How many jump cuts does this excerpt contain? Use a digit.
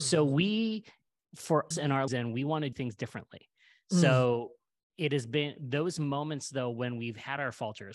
3